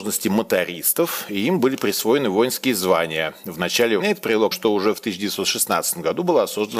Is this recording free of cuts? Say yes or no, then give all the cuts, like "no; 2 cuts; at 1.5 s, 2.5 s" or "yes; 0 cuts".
no; 2 cuts; at 4.0 s, 4.5 s